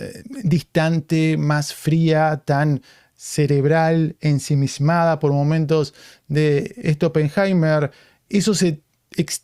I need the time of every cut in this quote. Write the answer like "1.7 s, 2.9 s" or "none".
none